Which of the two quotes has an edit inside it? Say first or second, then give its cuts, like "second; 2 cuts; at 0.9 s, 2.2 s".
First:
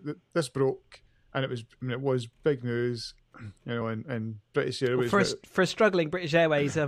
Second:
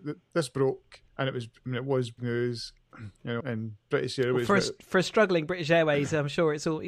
second; 3 cuts; at 1.1 s, 2.2 s, 3.4 s